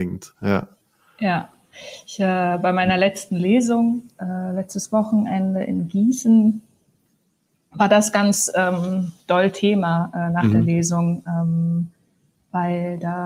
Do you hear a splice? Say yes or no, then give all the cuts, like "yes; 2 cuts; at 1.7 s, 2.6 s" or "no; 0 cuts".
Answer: yes; 1 cut; at 9.2 s